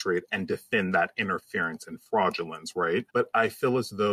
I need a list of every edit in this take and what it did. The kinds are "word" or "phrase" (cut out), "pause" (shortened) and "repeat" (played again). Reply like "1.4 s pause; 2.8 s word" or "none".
3.1 s pause